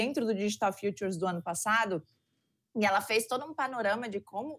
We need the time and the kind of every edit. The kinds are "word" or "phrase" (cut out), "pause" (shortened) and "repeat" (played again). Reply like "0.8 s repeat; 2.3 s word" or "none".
none